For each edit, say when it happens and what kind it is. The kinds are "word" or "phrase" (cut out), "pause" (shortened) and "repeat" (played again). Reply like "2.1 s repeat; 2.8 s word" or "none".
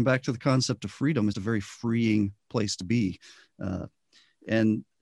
1.3 s word